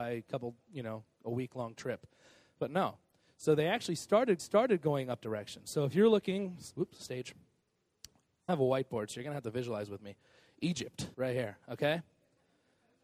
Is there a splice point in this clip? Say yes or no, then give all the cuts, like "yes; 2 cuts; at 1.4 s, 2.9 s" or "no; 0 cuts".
yes; 4 cuts; at 4.4 s, 5.2 s, 8.5 s, 11.1 s